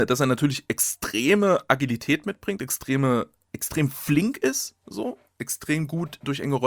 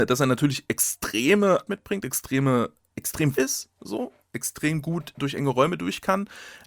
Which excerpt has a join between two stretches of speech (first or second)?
second